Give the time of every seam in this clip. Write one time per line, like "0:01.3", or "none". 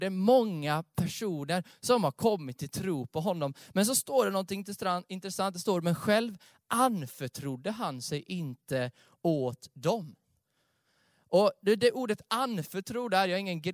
none

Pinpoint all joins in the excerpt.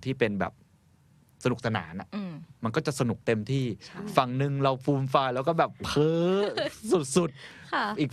0:02.6
0:03.2

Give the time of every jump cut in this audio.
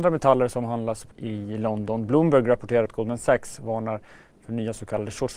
0:01.1
0:02.9

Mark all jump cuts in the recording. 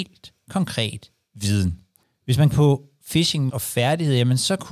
0:02.0
0:02.5
0:03.5

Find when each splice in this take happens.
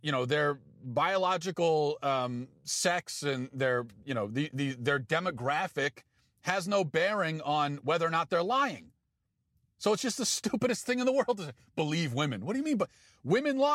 none

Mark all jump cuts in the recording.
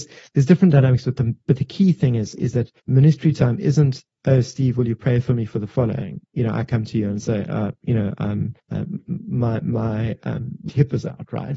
0:02.8
0:06.2
0:08.6
0:10.7

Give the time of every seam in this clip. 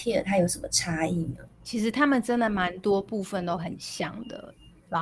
0:01.5

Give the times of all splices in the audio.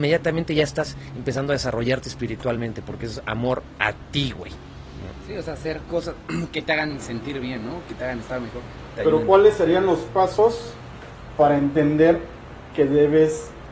none

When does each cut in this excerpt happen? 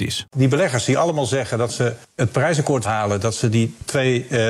0:02.8

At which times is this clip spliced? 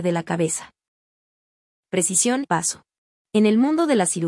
0:02.4

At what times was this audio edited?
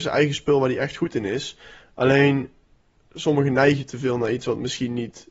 none

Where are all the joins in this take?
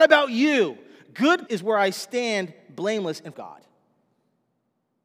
0:01.5
0:03.3

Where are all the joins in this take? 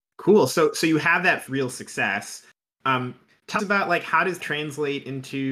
0:01.5
0:03.6
0:04.4

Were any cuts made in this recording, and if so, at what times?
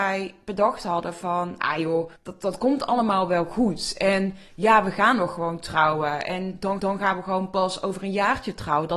0:02.2
0:06.8

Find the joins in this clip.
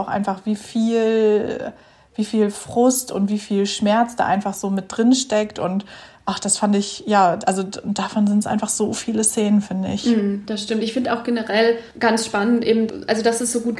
none

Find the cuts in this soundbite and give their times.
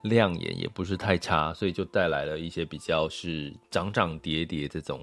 0:03.6

